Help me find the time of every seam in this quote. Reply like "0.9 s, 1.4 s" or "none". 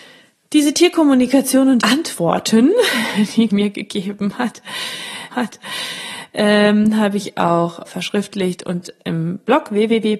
1.8 s, 3.5 s, 5.3 s, 7.9 s